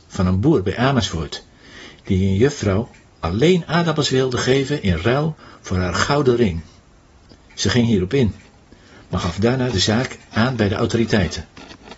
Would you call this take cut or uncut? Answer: uncut